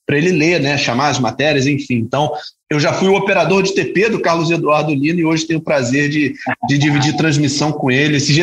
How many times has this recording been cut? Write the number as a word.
zero